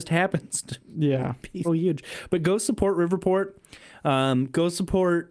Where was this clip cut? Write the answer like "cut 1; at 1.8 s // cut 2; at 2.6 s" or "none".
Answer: cut 1; at 1.6 s